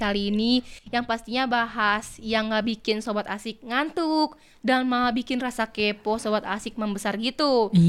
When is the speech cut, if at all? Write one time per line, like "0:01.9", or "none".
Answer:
none